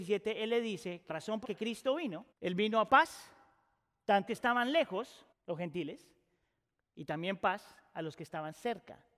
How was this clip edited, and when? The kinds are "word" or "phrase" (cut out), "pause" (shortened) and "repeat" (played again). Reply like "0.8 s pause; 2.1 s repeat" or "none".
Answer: 1.1 s word; 1.4 s word; 2.3 s pause; 2.9 s word; 4.3 s phrase; 5.3 s pause